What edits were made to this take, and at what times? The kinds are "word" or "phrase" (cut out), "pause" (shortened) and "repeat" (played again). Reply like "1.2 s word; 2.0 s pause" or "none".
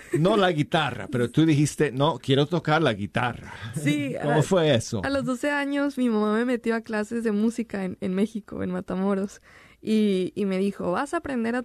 none